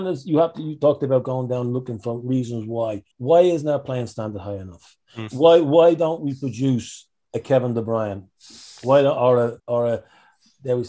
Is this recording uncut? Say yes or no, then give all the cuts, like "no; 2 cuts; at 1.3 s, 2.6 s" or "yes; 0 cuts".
no; 2 cuts; at 3.1 s, 9.6 s